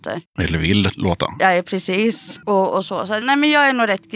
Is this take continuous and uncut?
no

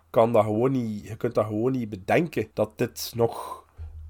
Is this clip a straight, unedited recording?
no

